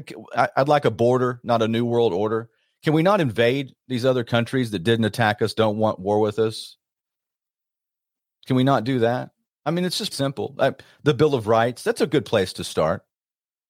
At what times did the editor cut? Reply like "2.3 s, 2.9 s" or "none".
10.1 s